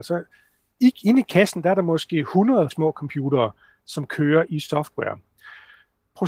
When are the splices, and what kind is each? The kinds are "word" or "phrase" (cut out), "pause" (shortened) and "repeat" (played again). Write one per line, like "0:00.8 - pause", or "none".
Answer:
0:02.7 - word